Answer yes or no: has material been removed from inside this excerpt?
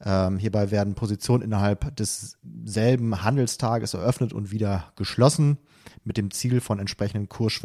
no